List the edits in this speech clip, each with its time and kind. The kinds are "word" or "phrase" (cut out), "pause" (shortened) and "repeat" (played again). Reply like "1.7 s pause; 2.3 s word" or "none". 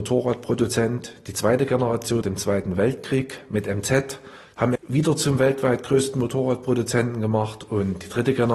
2.2 s word; 4.8 s word